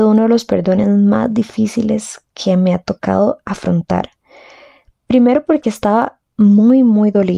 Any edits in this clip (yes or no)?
no